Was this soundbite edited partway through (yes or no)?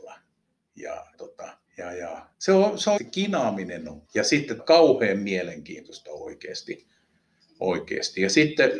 yes